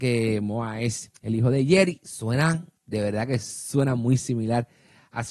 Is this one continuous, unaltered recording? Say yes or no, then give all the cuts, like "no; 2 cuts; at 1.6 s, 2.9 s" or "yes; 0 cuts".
no; 2 cuts; at 1.2 s, 2.8 s